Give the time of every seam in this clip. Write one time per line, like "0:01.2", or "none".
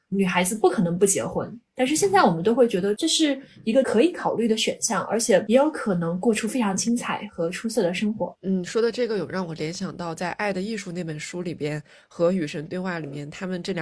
none